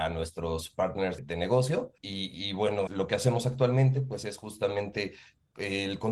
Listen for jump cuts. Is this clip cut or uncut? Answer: cut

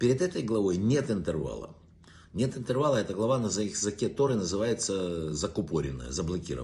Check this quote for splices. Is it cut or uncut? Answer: uncut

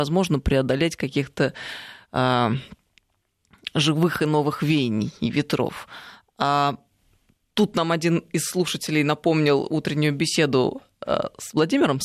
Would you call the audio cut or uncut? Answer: uncut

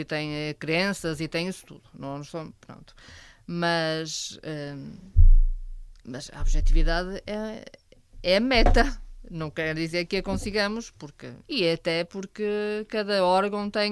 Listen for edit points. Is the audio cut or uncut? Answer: cut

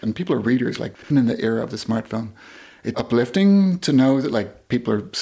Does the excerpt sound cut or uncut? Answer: cut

